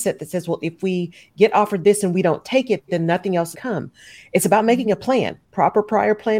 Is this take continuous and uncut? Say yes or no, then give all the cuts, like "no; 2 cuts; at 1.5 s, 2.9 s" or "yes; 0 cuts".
no; 1 cut; at 3.5 s